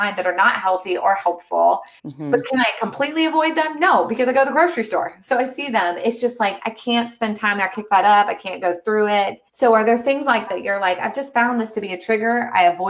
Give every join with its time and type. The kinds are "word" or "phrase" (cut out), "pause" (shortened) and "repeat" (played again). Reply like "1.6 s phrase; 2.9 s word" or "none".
2.0 s pause; 7.7 s word; 9.5 s pause; 10.5 s word